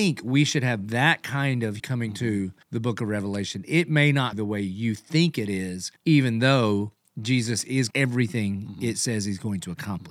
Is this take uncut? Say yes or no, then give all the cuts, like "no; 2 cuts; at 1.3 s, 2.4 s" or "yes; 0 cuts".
no; 5 cuts; at 1.8 s, 2.6 s, 4.3 s, 6.0 s, 7.9 s